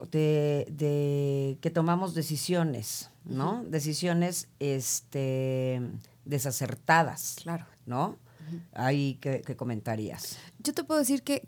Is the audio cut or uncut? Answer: cut